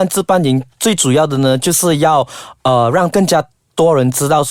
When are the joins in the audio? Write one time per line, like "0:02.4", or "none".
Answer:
none